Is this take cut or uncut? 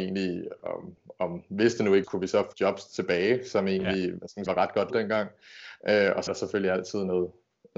cut